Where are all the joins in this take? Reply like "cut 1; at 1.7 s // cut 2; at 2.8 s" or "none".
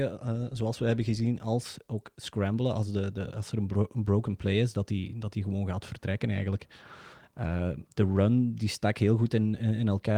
none